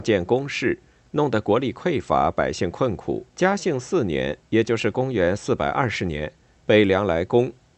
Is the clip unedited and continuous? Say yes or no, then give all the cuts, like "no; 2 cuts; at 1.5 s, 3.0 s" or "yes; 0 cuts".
no; 1 cut; at 3.3 s